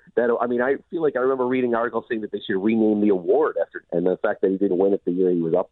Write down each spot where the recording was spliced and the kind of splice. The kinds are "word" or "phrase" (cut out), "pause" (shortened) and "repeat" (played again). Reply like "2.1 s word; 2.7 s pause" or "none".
3.8 s phrase; 4.7 s word